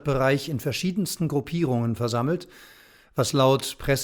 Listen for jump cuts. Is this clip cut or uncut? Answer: uncut